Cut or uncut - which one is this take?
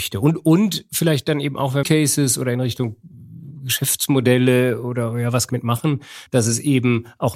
cut